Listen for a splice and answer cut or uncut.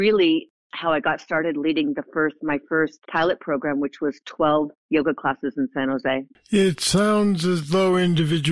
cut